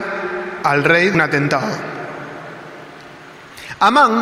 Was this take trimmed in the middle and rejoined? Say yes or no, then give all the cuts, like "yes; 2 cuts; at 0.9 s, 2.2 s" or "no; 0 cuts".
yes; 1 cut; at 1.1 s